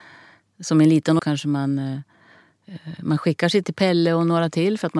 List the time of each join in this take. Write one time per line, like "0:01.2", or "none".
0:01.2
0:03.6